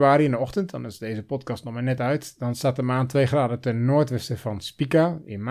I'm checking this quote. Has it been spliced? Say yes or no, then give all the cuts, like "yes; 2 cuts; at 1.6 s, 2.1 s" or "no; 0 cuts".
no; 0 cuts